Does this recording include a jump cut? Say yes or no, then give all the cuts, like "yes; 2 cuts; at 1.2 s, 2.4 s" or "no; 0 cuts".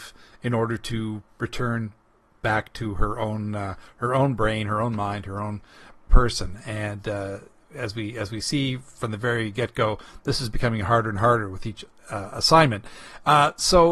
no; 0 cuts